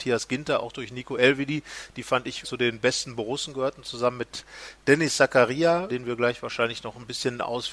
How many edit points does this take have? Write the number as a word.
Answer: two